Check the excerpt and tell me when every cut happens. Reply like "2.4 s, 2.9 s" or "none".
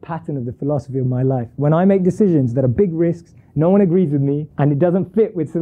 4.5 s